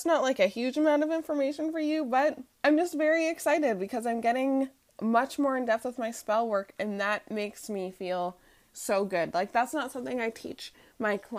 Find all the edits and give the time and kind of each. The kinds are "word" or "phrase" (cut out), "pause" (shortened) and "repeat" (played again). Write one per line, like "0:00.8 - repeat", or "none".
0:02.5 - pause